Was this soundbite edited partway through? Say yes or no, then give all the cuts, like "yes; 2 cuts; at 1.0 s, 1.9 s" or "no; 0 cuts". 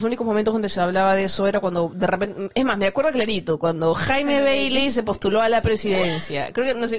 no; 0 cuts